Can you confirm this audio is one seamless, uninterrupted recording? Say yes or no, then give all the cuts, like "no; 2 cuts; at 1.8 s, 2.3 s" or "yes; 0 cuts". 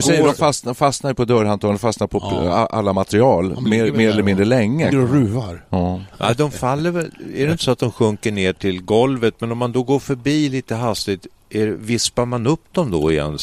no; 1 cut; at 4.9 s